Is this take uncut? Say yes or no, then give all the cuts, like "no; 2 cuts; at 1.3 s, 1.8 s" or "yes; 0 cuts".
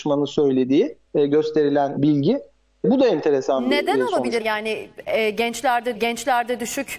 no; 5 cuts; at 1.1 s, 2.0 s, 2.8 s, 4.4 s, 5.9 s